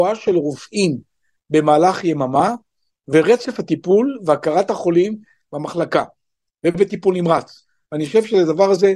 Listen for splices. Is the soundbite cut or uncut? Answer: uncut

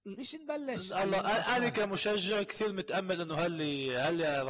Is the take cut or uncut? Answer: uncut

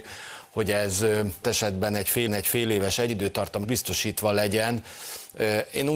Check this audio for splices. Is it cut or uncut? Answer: cut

